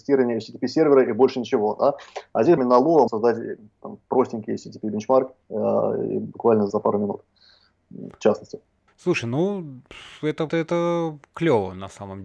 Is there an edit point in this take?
yes; 6 cuts; at 2.6 s, 3.1 s, 5.4 s, 6.7 s, 8.9 s, 10.5 s

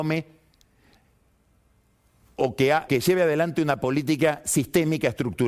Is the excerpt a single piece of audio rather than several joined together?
no; 1 cut; at 2.9 s

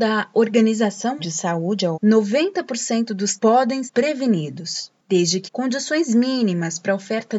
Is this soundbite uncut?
no; 5 cuts; at 1.2 s, 1.9 s, 3.4 s, 3.9 s, 5.5 s

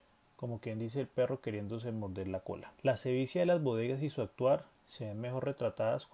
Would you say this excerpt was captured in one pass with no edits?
no; 1 cut; at 2.8 s

